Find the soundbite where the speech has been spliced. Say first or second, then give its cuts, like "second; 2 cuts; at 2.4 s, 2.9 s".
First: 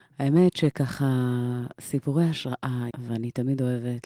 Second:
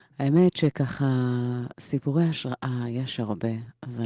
first; 1 cut; at 2.9 s